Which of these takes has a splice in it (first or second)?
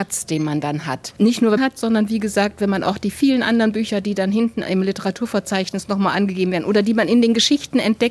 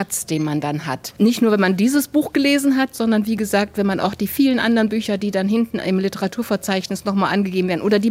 first